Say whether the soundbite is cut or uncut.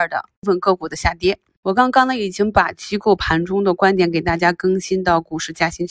uncut